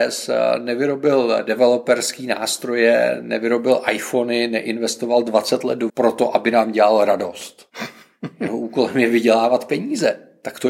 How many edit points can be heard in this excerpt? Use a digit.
1